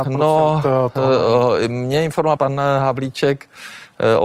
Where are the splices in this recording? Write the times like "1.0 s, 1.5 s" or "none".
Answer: 2.4 s